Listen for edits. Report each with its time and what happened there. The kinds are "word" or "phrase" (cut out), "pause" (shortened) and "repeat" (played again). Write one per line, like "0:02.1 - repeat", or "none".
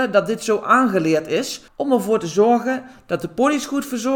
0:01.7 - pause